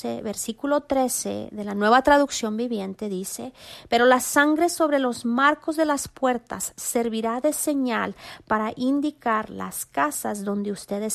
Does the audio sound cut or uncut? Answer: uncut